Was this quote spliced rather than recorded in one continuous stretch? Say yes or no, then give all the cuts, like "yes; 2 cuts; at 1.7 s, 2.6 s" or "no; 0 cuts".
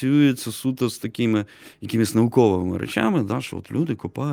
no; 0 cuts